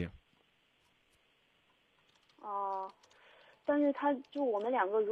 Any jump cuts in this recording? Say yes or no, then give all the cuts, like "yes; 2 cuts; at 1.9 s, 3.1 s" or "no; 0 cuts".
no; 0 cuts